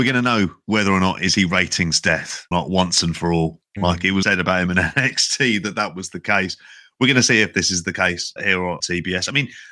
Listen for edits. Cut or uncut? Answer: cut